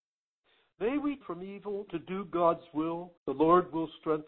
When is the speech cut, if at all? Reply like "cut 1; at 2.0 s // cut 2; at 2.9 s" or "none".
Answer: cut 1; at 1.2 s // cut 2; at 1.9 s // cut 3; at 3.2 s